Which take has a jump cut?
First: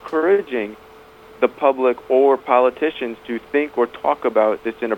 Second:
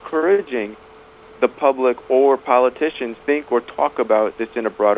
second; 1 cut; at 3.2 s

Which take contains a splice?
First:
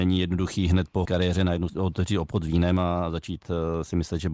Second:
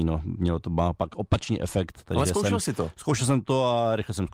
first; 2 cuts; at 1.0 s, 1.7 s

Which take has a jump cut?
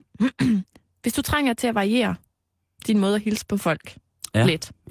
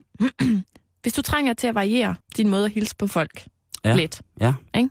second; 1 cut; at 2.2 s

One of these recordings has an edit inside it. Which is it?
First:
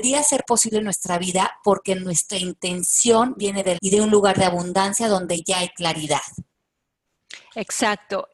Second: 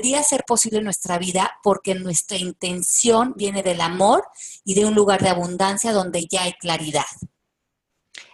first; 1 cut; at 3.8 s

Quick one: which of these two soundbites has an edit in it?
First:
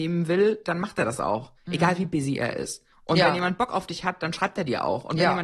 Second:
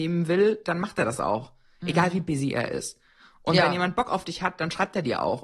first; 2 cuts; at 1.6 s, 2.9 s

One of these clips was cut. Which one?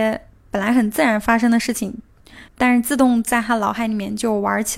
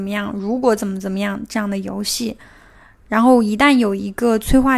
first; 1 cut; at 2.5 s

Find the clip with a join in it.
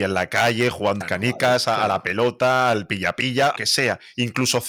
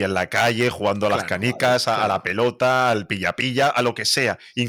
first; 2 cuts; at 1.0 s, 3.6 s

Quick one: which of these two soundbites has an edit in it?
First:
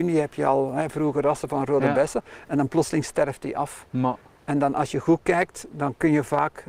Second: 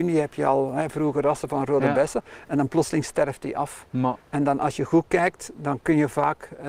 second; 1 cut; at 4.2 s

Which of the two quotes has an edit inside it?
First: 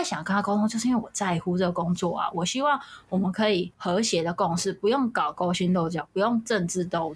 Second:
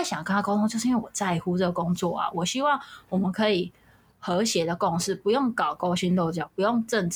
first; 1 cut; at 3.7 s

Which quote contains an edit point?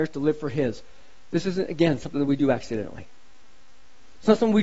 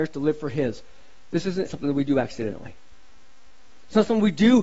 second; 1 cut; at 1.7 s

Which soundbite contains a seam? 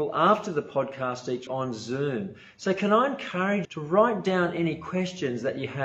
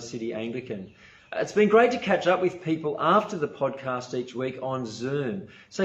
first; 2 cuts; at 1.5 s, 3.6 s

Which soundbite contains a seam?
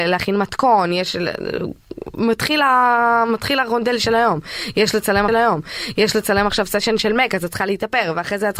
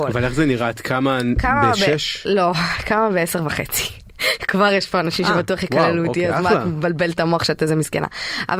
first; 1 cut; at 5.3 s

